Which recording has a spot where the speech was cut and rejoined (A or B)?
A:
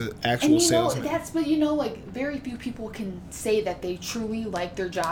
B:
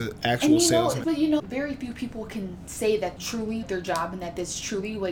B